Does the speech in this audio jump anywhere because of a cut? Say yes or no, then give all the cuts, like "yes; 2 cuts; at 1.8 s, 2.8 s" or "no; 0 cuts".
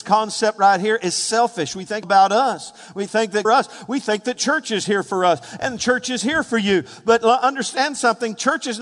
yes; 2 cuts; at 2.0 s, 3.4 s